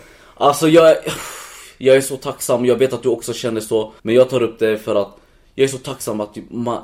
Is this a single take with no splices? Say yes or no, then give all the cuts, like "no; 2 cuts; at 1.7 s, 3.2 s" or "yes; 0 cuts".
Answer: no; 1 cut; at 4.0 s